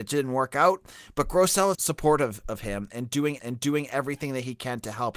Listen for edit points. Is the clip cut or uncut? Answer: cut